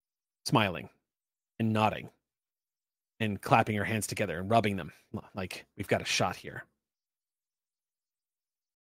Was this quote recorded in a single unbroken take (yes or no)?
yes